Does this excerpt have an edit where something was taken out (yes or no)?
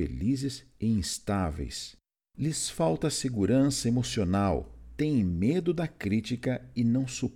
no